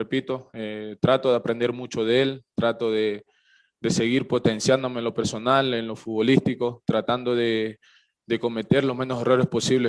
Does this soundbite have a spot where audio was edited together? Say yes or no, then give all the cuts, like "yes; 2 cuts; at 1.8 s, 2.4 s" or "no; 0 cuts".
no; 0 cuts